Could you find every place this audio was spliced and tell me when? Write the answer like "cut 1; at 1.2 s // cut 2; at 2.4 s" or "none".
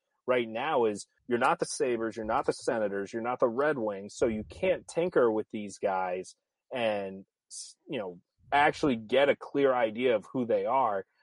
cut 1; at 1.2 s